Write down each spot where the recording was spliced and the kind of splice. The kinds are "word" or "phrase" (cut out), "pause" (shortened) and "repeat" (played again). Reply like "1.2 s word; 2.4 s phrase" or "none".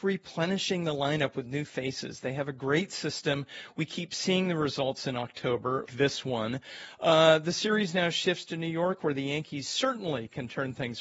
5.9 s word